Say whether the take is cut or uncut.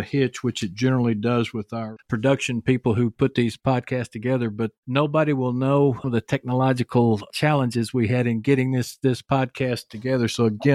cut